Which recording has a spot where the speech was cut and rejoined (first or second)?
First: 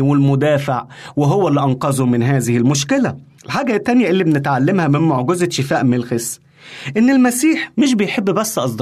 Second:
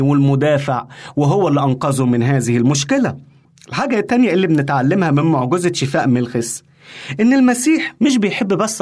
first